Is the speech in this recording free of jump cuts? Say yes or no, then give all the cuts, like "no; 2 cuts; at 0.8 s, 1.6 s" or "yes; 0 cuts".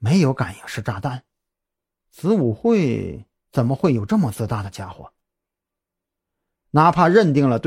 yes; 0 cuts